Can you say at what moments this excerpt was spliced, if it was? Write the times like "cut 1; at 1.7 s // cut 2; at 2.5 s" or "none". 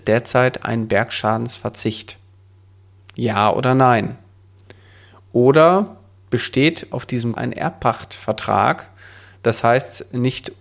cut 1; at 7.3 s